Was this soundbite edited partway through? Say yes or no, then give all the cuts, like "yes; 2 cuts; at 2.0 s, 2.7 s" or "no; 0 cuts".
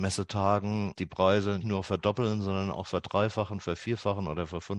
yes; 2 cuts; at 1.0 s, 1.6 s